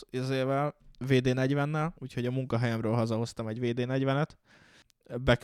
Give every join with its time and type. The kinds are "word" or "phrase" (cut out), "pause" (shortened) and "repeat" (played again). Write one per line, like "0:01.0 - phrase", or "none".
0:02.0 - pause